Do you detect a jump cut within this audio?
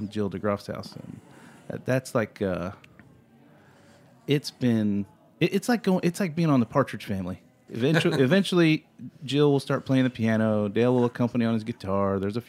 yes; 1 cut; at 7.7 s

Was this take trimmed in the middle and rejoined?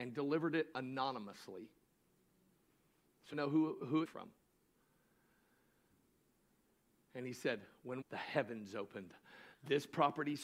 yes; 3 cuts; at 3.3 s, 4.0 s, 8.0 s

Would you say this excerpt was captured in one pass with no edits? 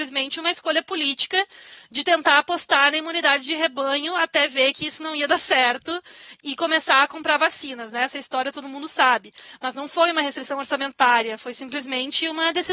yes; 0 cuts

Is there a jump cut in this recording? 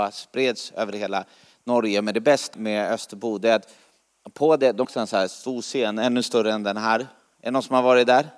yes; 2 cuts; at 2.5 s, 4.8 s

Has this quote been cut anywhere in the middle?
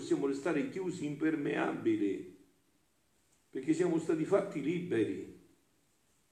no; 0 cuts

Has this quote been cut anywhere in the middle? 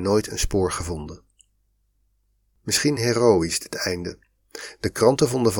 no; 0 cuts

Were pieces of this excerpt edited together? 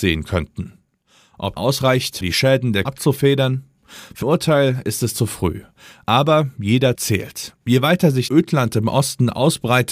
yes; 6 cuts; at 1.6 s, 2.2 s, 2.8 s, 4.2 s, 6.9 s, 8.3 s

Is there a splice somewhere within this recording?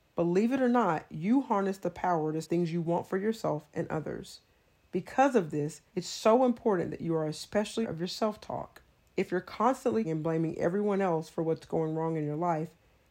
yes; 5 cuts; at 2.4 s, 5.9 s, 7.8 s, 9.0 s, 10.0 s

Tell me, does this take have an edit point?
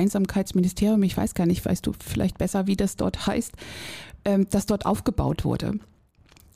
no; 0 cuts

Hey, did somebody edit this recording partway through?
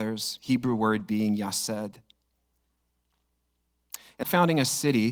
yes; 1 cut; at 4.2 s

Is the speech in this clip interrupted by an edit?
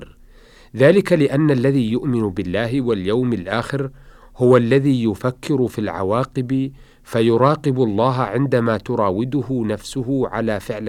no; 0 cuts

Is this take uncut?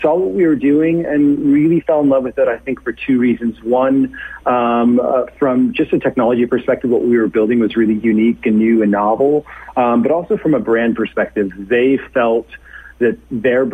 yes; 0 cuts

